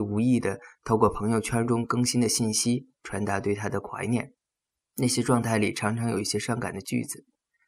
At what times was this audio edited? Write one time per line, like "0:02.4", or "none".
0:02.9
0:04.6